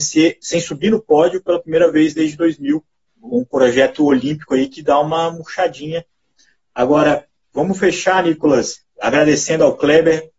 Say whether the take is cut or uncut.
uncut